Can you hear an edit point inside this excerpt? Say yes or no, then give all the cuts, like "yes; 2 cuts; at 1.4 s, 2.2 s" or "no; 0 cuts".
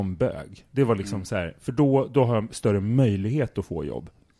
no; 0 cuts